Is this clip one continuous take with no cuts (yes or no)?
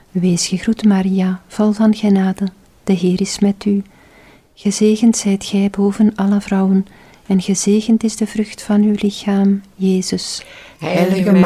yes